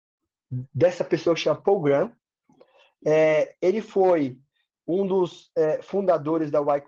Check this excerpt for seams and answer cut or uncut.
uncut